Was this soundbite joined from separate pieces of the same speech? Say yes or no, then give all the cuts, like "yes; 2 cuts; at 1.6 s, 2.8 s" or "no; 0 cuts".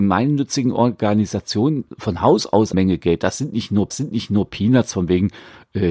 yes; 3 cuts; at 1.9 s, 2.7 s, 3.9 s